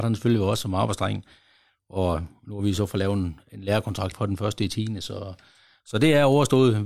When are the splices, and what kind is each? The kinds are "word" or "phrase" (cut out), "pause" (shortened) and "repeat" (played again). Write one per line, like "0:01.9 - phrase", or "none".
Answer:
0:04.1 - phrase